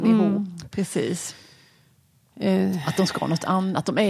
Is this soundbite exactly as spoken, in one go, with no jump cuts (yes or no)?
yes